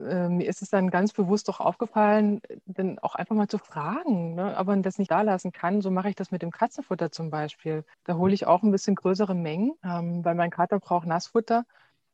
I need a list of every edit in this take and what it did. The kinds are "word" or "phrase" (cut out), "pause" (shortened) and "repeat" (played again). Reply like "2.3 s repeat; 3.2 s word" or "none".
5.1 s word; 7.9 s pause; 9.8 s pause